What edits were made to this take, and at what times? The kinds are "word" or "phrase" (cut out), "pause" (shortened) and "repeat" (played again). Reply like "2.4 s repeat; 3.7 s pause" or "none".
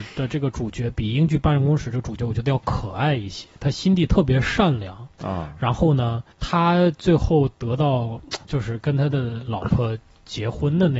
6.3 s pause; 8.4 s pause